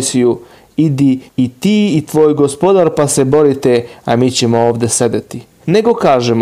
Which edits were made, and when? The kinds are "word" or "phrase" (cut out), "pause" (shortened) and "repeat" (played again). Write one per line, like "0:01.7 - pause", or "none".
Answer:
0:01.3 - pause